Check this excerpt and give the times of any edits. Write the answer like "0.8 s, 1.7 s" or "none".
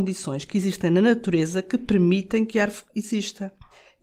none